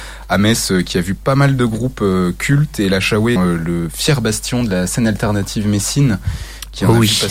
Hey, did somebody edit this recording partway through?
yes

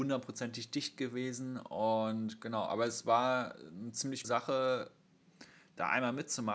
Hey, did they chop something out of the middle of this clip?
yes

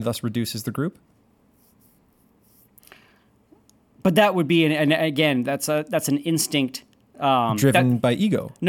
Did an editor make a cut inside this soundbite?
no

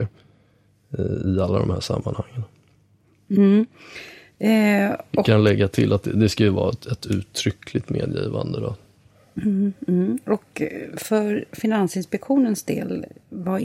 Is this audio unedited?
yes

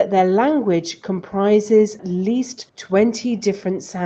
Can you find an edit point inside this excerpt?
yes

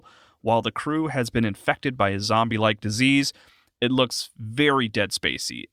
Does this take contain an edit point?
no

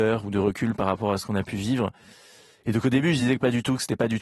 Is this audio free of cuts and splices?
yes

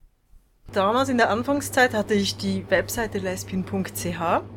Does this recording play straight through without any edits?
yes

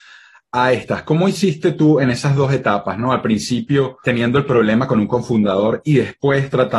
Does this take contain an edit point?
yes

